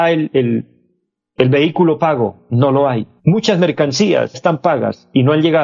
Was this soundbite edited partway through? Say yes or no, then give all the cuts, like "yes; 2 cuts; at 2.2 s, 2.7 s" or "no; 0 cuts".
yes; 2 cuts; at 3.2 s, 4.3 s